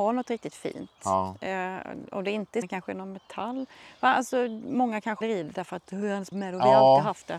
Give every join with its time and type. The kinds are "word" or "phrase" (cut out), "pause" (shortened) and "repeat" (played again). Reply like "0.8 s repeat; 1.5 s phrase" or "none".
2.6 s word; 5.2 s word; 6.3 s phrase